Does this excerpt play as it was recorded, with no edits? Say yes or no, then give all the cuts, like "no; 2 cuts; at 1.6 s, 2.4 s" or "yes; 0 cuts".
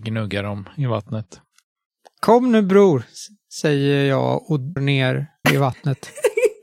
no; 2 cuts; at 4.8 s, 5.4 s